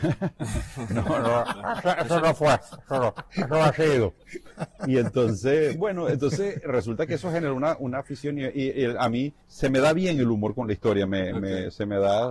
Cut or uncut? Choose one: cut